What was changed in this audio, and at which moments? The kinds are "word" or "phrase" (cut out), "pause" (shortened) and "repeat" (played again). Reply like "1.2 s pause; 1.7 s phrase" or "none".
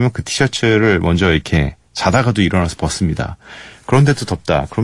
none